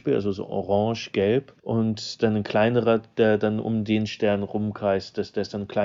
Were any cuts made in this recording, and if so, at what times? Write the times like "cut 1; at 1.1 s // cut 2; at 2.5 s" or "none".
cut 1; at 1.6 s

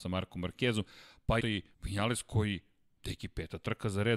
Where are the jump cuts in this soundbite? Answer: cut 1; at 1.4 s // cut 2; at 1.7 s

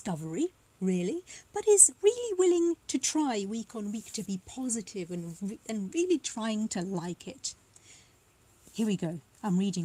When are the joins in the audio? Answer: none

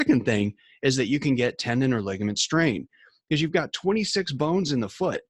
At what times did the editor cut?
none

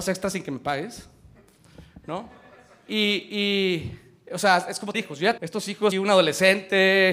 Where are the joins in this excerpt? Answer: cut 1; at 4.9 s // cut 2; at 5.4 s // cut 3; at 5.9 s

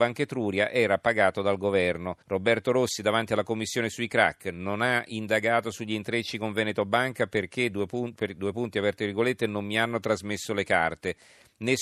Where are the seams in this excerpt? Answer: cut 1; at 2.2 s

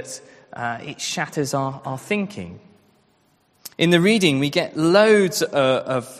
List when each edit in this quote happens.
cut 1; at 3.7 s

